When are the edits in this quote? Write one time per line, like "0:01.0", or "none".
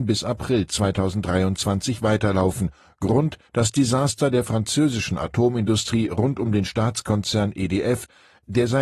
0:03.5